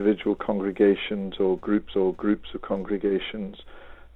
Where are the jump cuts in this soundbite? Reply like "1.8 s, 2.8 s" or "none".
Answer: 1.9 s